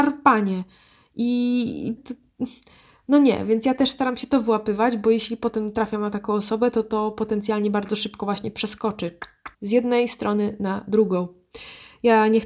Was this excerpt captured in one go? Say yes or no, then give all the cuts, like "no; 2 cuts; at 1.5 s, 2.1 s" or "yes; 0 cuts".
no; 2 cuts; at 2.0 s, 9.5 s